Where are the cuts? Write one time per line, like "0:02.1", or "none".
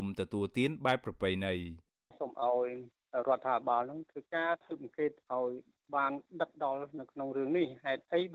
none